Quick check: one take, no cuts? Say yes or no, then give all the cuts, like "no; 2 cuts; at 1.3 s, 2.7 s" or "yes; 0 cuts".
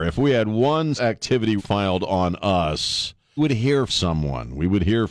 no; 4 cuts; at 1.0 s, 1.6 s, 3.4 s, 3.9 s